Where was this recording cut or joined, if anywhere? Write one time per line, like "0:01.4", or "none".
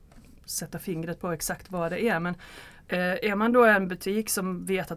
none